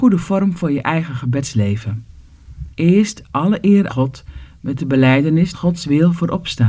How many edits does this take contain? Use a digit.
3